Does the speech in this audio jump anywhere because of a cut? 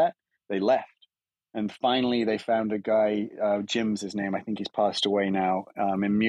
yes; 1 cut; at 1.3 s

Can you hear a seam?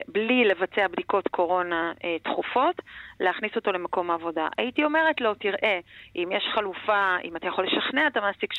no; 0 cuts

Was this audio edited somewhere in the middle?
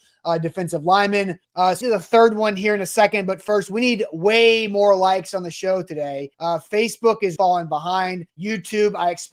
yes; 5 cuts; at 1.4 s, 1.8 s, 6.3 s, 7.4 s, 8.3 s

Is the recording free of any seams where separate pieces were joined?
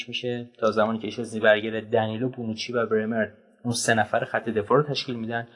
yes; 0 cuts

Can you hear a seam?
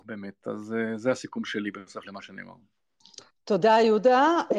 no; 0 cuts

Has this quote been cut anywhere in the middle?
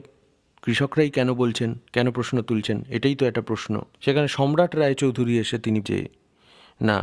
yes; 3 cuts; at 1.9 s, 3.9 s, 5.8 s

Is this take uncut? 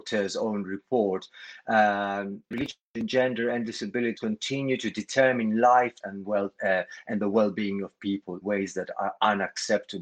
no; 4 cuts; at 2.5 s, 4.2 s, 6.0 s, 8.4 s

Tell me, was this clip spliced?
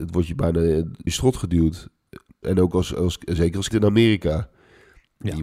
yes; 3 cuts; at 1.1 s, 2.4 s, 3.7 s

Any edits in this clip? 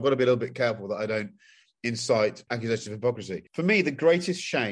yes; 2 cuts; at 2.5 s, 3.5 s

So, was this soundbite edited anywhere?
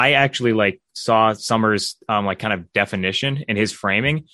no; 0 cuts

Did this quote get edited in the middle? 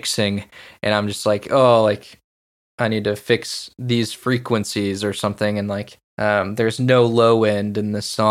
yes; 1 cut; at 6.1 s

